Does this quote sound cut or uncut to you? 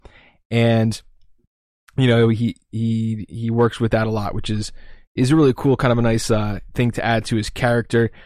uncut